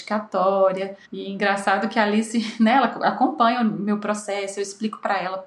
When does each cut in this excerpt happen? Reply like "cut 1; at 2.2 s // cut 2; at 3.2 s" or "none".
cut 1; at 1.0 s